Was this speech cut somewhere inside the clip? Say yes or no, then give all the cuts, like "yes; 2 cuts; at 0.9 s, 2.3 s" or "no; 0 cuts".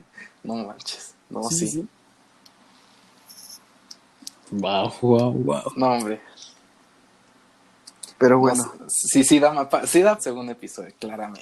yes; 3 cuts; at 5.0 s, 8.1 s, 10.2 s